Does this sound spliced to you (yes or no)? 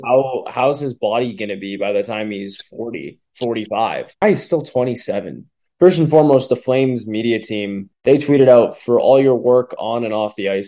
yes